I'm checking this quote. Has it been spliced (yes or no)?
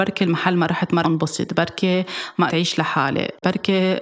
yes